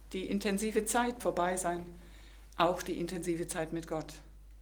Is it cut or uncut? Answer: cut